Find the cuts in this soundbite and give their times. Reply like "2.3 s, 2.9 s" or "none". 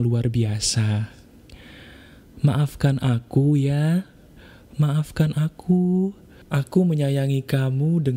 none